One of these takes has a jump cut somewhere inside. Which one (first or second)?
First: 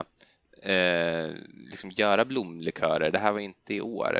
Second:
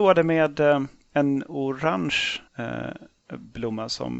second